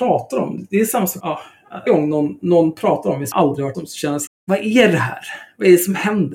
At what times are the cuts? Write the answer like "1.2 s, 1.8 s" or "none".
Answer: 1.2 s, 1.9 s, 3.3 s, 3.7 s, 4.3 s